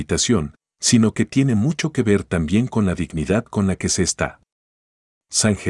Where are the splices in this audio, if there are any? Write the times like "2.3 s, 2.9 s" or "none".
none